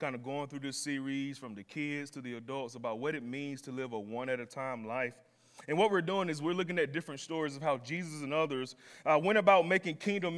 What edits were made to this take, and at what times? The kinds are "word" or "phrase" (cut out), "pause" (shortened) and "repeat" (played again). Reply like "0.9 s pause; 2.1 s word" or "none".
none